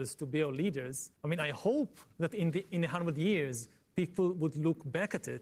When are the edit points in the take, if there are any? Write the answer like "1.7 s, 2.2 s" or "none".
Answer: 1.2 s, 2.1 s